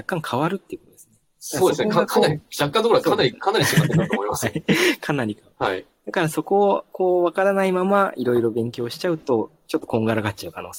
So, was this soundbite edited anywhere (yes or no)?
no